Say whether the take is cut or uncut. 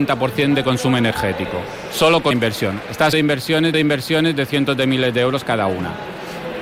cut